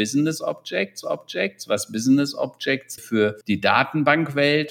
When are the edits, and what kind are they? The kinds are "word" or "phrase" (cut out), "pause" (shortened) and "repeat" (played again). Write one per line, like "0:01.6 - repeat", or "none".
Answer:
0:01.0 - repeat
0:03.0 - word
0:03.4 - pause